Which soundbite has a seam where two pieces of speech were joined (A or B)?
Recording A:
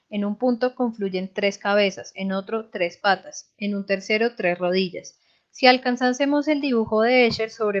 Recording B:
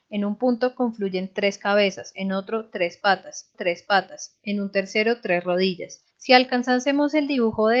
B